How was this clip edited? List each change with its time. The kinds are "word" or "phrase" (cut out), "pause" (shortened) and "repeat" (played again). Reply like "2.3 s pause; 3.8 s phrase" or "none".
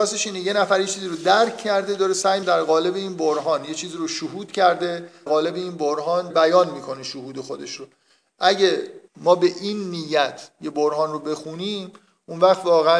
2.4 s word; 5.3 s word; 6.3 s word; 9.1 s pause